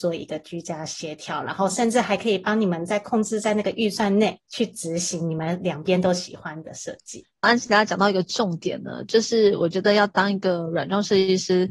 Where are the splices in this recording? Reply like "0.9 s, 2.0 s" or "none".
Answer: 4.5 s, 7.4 s